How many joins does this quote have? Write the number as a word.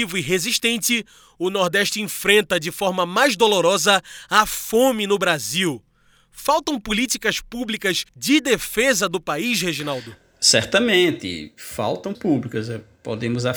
two